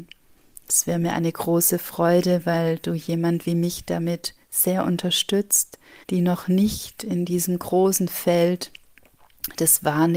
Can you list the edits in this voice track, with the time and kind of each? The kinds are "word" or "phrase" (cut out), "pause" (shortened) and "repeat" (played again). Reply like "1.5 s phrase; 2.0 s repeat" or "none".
6.0 s pause